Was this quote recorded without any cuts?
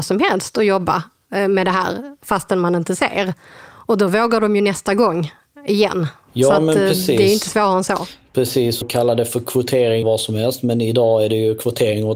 no; 2 cuts; at 8.8 s, 10.0 s

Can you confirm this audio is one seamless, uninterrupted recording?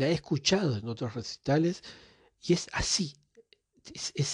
yes; 0 cuts

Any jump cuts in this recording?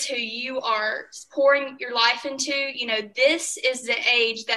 no; 0 cuts

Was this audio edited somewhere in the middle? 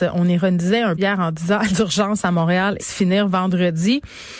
yes; 3 cuts; at 1.0 s, 1.7 s, 2.8 s

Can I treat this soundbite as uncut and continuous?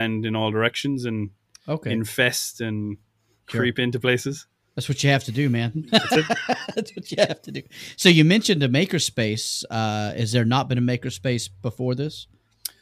yes; 0 cuts

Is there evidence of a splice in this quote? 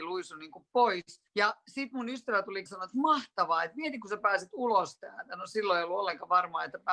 yes; 2 cuts; at 1.3 s, 2.7 s

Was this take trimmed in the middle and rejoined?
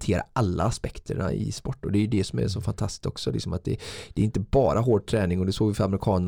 no; 0 cuts

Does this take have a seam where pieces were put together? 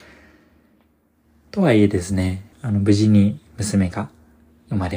yes; 1 cut; at 2.5 s

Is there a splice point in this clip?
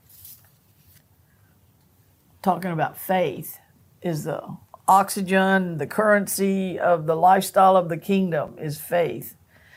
no; 0 cuts

